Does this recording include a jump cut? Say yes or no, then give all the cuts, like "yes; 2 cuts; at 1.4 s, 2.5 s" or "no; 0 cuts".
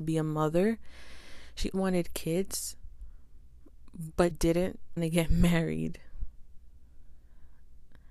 yes; 3 cuts; at 1.7 s, 4.3 s, 5.0 s